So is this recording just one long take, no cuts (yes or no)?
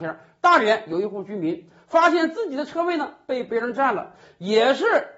yes